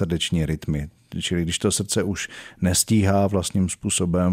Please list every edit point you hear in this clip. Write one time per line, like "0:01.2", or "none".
none